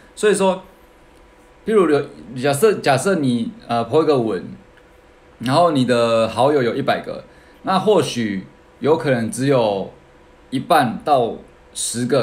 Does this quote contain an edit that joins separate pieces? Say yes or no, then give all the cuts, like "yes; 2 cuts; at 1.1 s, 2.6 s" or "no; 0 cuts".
yes; 1 cut; at 8.6 s